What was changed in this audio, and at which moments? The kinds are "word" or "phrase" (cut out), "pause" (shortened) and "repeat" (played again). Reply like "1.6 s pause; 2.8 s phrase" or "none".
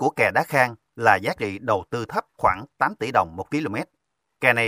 2.3 s pause